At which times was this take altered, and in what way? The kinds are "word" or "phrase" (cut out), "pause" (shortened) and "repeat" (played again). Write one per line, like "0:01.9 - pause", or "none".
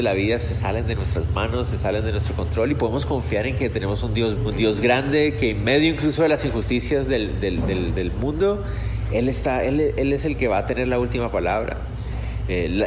0:04.4 - word